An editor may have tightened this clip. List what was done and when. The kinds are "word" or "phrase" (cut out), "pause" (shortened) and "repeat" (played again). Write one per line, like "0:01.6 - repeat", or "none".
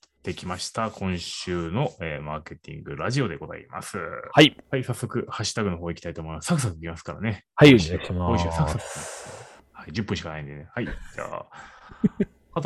0:04.6 - pause